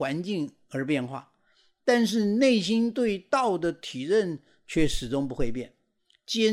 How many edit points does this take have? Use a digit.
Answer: 0